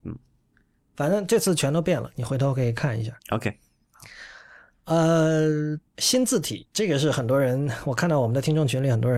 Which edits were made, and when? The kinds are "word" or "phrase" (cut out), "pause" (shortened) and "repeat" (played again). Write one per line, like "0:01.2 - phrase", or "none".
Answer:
0:03.2 - pause
0:05.9 - pause